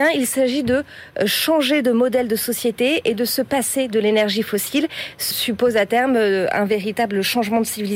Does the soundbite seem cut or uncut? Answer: cut